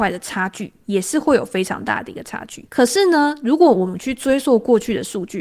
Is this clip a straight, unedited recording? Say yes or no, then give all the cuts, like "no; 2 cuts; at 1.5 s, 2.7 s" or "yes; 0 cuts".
no; 1 cut; at 2.7 s